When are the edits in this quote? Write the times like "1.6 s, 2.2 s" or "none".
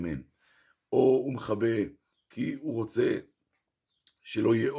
none